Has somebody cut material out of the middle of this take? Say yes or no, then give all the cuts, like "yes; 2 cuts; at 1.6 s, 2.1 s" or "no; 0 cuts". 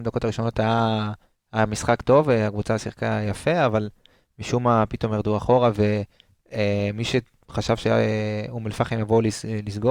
no; 0 cuts